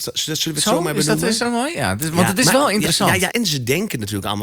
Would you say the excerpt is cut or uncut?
cut